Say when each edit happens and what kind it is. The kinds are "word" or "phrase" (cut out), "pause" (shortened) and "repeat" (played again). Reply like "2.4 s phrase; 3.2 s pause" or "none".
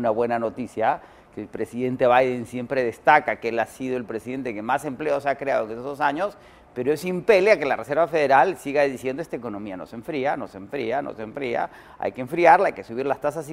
none